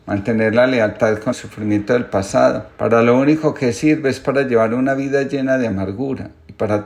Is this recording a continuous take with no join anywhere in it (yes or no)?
no